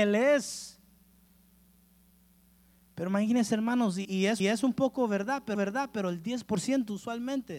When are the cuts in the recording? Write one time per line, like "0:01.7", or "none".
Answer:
0:04.0
0:04.4
0:05.5